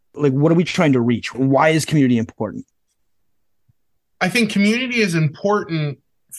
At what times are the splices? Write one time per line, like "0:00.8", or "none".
none